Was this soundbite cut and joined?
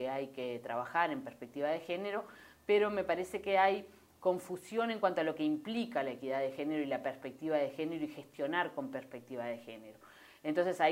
no; 0 cuts

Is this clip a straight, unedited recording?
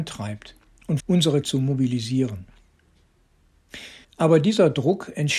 no; 3 cuts; at 1.0 s, 1.4 s, 4.0 s

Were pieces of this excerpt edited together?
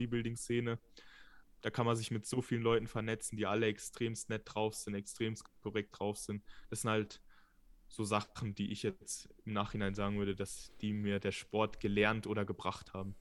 no; 0 cuts

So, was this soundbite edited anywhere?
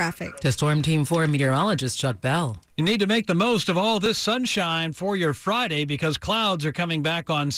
no; 0 cuts

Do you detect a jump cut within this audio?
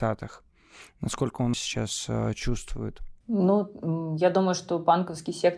yes; 2 cuts; at 1.5 s, 3.2 s

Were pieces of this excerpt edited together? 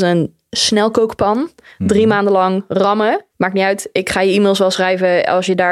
yes; 1 cut; at 3.3 s

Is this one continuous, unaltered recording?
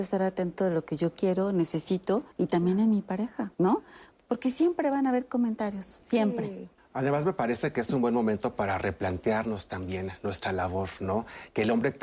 no; 3 cuts; at 2.3 s, 3.5 s, 6.8 s

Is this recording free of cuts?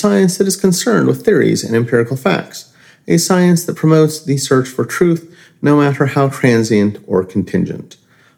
yes; 0 cuts

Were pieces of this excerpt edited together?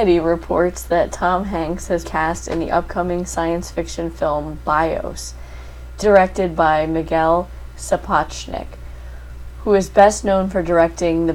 yes; 2 cuts; at 2.0 s, 6.0 s

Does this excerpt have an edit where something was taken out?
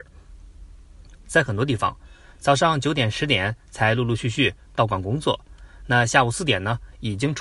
no; 0 cuts

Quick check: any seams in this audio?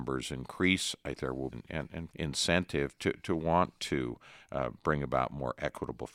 yes; 3 cuts; at 1.1 s, 1.5 s, 2.1 s

